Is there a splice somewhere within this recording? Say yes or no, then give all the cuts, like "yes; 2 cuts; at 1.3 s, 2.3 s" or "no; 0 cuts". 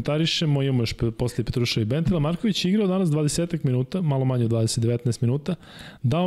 no; 0 cuts